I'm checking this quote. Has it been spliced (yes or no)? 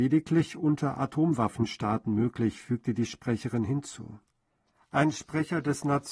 no